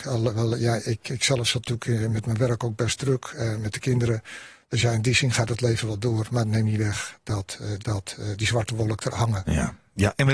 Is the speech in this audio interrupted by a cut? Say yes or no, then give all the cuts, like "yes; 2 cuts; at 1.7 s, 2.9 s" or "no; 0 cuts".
yes; 2 cuts; at 7.8 s, 9.1 s